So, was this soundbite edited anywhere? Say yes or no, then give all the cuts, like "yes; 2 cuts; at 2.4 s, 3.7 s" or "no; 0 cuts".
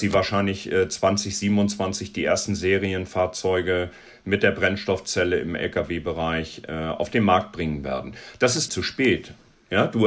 yes; 1 cut; at 8.7 s